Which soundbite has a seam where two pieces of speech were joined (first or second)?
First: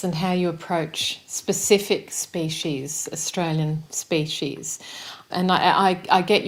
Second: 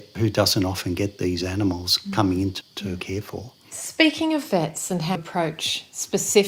second